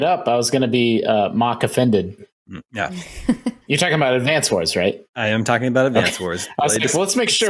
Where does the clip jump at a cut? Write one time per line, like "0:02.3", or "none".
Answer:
0:05.1